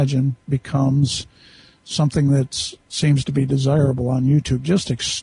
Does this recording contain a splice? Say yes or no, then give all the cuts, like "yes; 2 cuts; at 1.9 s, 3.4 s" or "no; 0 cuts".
no; 0 cuts